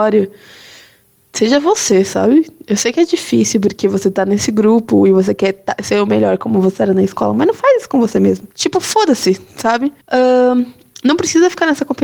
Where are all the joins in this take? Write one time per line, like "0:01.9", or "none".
0:08.5
0:10.0